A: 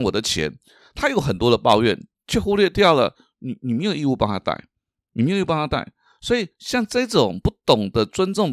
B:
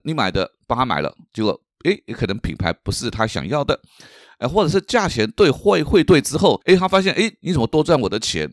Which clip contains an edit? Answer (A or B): B